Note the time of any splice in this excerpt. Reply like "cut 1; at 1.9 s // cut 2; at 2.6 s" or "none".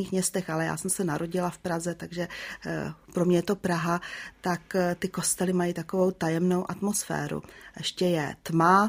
none